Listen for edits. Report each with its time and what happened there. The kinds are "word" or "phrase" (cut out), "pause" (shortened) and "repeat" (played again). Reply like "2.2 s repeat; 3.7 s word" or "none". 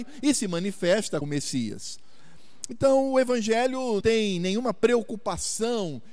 1.2 s word; 4.0 s word